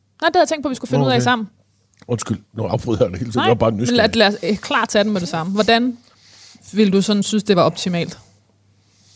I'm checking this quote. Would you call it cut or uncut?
cut